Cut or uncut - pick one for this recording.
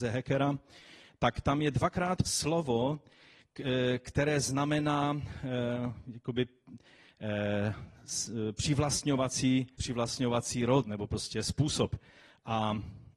cut